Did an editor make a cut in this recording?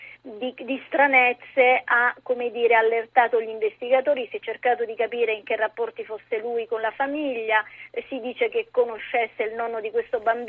no; 0 cuts

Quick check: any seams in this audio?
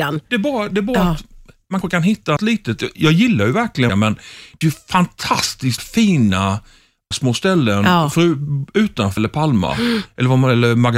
yes; 8 cuts; at 1.8 s, 2.4 s, 2.9 s, 3.9 s, 4.6 s, 5.8 s, 7.1 s, 9.2 s

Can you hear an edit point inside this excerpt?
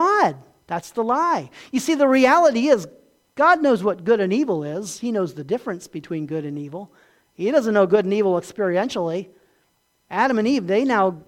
no; 0 cuts

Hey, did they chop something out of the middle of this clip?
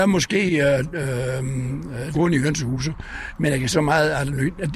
yes; 2 cuts; at 2.1 s, 3.7 s

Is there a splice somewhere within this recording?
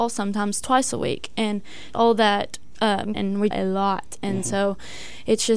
yes; 3 cuts; at 1.9 s, 3.1 s, 3.5 s

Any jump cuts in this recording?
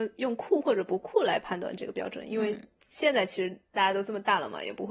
no; 0 cuts

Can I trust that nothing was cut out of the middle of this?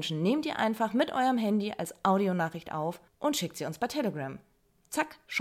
no; 1 cut; at 3.1 s

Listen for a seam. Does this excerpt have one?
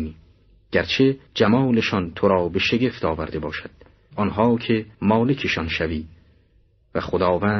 yes; 3 cuts; at 1.3 s, 4.1 s, 4.9 s

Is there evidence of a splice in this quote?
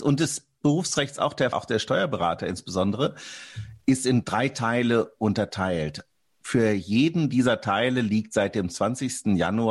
yes; 1 cut; at 1.5 s

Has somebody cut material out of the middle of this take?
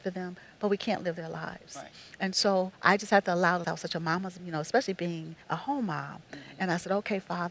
yes; 4 cuts; at 2.7 s, 3.6 s, 4.4 s, 5.4 s

